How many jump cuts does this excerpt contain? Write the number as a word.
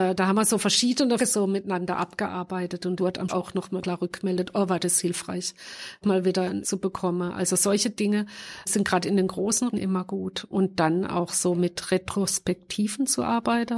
nine